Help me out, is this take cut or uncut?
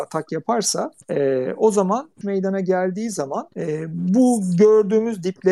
cut